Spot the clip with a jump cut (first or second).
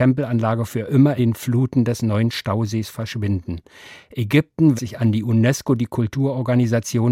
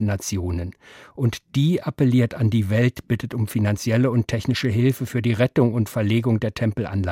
first